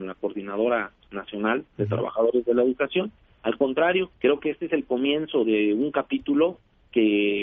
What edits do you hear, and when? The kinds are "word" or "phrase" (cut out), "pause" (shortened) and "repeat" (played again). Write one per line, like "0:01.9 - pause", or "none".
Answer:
0:04.2 - pause